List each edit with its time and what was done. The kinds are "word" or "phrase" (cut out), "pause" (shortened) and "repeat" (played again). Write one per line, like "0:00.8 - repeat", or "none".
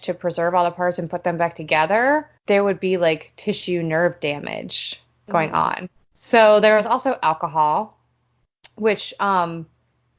0:02.4 - pause
0:06.0 - pause